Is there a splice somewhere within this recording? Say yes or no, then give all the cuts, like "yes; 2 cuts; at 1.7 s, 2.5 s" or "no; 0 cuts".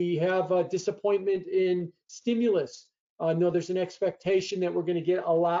no; 0 cuts